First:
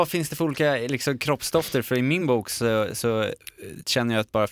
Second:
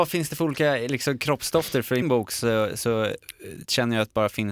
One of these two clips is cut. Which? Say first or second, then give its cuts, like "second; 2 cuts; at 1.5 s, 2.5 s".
second; 1 cut; at 2.0 s